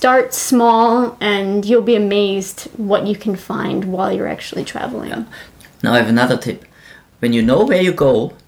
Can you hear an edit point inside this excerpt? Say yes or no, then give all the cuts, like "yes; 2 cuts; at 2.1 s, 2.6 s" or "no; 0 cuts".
no; 0 cuts